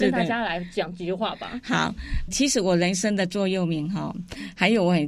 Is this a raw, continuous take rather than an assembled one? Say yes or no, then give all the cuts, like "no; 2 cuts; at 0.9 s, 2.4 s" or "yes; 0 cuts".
no; 1 cut; at 2.3 s